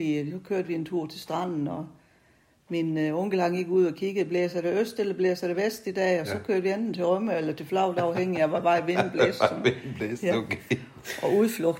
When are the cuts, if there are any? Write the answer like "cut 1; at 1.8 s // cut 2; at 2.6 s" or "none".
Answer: none